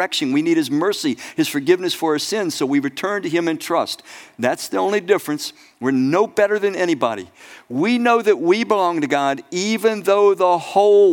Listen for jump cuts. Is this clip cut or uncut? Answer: uncut